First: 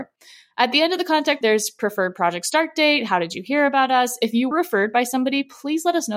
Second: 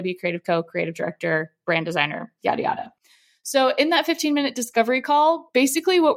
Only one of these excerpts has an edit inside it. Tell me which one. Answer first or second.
first